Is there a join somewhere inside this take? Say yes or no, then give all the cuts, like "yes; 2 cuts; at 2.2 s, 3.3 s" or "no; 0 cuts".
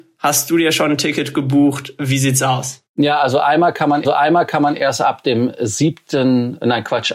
yes; 1 cut; at 4.0 s